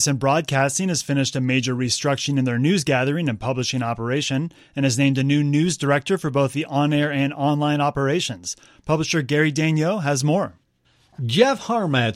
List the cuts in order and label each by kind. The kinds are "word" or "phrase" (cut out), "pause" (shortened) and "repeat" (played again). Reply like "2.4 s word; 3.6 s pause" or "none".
none